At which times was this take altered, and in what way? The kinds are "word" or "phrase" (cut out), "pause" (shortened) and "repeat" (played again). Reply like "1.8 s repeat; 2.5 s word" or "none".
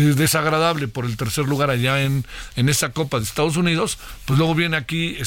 none